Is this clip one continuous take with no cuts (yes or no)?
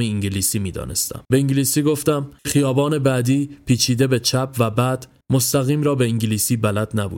no